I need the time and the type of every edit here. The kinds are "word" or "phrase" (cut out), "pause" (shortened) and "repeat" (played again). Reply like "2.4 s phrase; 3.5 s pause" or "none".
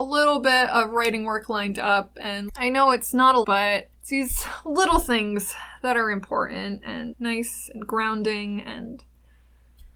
2.5 s word; 3.4 s word; 3.9 s pause; 7.1 s word